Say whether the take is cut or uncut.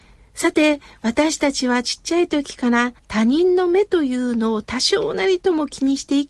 cut